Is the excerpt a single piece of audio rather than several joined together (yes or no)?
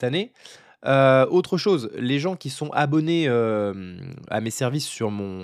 no